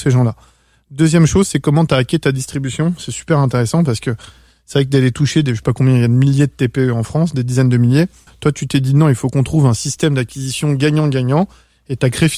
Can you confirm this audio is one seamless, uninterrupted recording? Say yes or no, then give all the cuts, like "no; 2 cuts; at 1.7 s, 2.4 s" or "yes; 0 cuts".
no; 1 cut; at 8.3 s